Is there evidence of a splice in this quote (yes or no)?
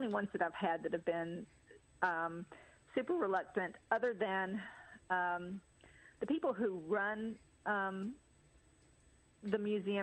no